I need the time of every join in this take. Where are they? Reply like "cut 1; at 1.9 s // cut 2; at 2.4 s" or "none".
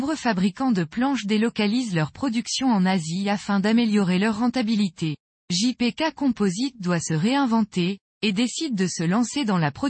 cut 1; at 5.2 s